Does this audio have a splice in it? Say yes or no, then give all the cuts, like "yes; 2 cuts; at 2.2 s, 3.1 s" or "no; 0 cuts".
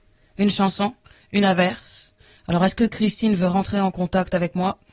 no; 0 cuts